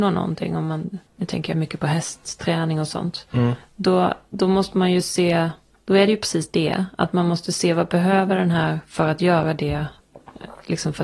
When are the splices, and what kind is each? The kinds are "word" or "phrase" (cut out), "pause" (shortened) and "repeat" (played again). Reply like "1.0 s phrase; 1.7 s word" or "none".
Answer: none